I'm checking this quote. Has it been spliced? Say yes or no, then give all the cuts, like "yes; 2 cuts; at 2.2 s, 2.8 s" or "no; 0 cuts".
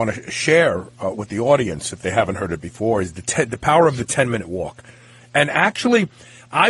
no; 0 cuts